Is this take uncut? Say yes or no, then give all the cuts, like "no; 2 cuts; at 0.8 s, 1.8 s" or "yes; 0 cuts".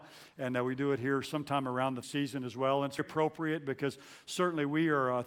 no; 2 cuts; at 2.0 s, 3.0 s